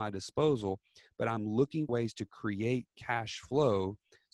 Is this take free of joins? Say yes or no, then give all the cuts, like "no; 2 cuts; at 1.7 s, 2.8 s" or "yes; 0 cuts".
no; 1 cut; at 1.9 s